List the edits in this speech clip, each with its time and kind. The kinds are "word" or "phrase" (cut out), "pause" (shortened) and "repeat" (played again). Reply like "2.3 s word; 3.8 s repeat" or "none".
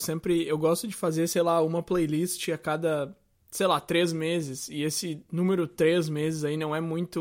none